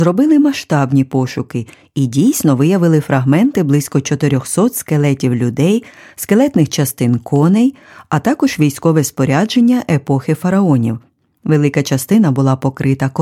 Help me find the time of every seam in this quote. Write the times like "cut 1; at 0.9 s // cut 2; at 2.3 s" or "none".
none